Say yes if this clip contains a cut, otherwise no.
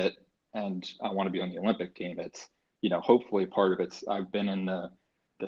no